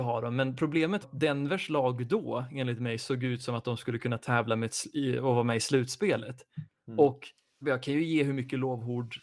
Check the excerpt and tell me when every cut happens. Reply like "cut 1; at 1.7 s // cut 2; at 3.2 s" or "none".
cut 1; at 1.0 s // cut 2; at 7.6 s